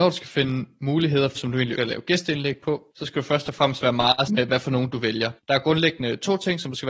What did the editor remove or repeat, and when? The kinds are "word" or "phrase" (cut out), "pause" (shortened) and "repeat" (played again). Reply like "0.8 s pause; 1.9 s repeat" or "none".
1.4 s word; 1.8 s word; 2.9 s pause; 4.3 s word; 5.4 s pause